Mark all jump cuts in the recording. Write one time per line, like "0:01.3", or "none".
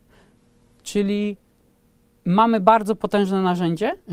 none